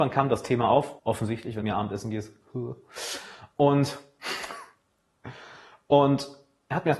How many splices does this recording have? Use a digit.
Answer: 2